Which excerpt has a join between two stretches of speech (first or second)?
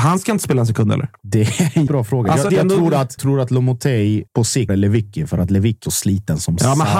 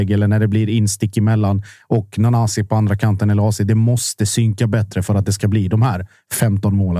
first